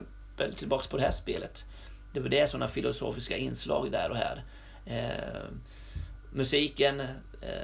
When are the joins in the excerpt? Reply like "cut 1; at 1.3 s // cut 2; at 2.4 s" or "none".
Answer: none